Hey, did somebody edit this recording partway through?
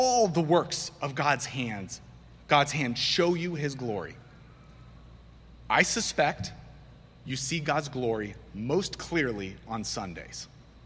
no; 0 cuts

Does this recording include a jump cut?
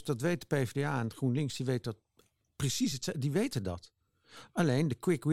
no; 0 cuts

